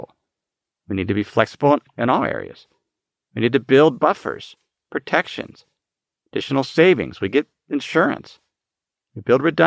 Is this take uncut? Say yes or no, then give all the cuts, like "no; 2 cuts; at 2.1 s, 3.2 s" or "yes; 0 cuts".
yes; 0 cuts